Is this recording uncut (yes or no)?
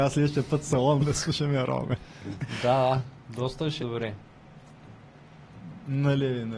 no